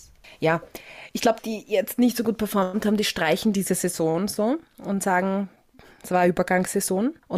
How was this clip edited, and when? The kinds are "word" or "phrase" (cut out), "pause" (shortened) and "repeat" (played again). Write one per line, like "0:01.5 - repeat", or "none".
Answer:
0:01.4 - phrase